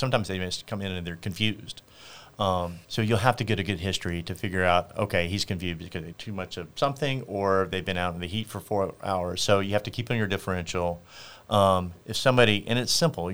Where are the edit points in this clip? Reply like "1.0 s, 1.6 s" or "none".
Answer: 2.8 s, 6.1 s